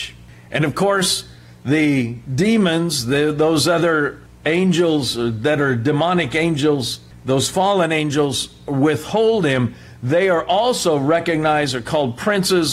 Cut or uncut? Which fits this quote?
uncut